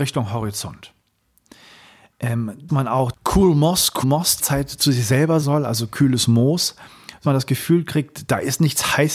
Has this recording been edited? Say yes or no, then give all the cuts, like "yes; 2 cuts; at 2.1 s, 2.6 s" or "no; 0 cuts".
yes; 6 cuts; at 2.7 s, 3.1 s, 4.0 s, 4.4 s, 5.4 s, 7.2 s